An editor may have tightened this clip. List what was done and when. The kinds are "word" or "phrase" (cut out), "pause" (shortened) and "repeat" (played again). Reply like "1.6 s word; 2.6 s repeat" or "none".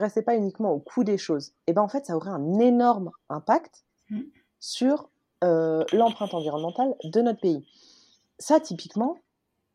none